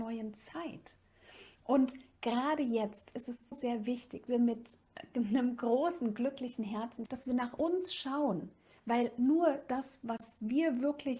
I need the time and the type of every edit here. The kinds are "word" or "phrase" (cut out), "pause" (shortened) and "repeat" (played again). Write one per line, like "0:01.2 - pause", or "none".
0:03.5 - word
0:04.3 - word
0:07.1 - word

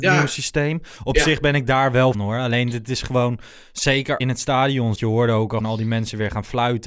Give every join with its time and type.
0:02.1 - phrase
0:04.2 - phrase
0:04.9 - word
0:05.6 - word

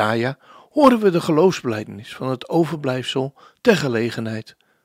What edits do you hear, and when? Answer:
none

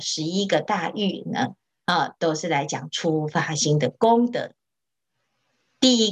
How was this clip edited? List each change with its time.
none

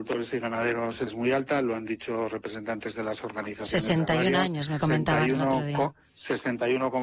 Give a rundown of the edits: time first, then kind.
0:01.1 - word
0:04.8 - phrase

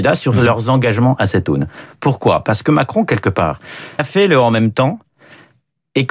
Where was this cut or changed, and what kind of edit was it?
0:04.0 - word

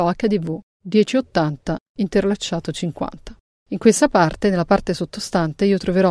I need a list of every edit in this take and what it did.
none

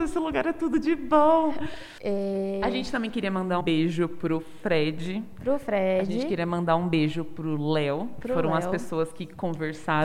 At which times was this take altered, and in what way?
0:03.6 - word

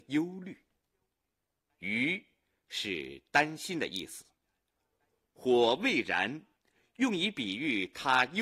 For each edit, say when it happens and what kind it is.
none

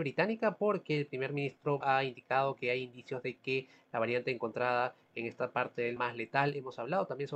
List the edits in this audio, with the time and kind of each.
0:01.8 - word
0:06.0 - phrase

